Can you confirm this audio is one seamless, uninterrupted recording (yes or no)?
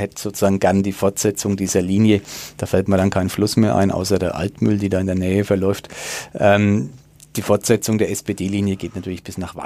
yes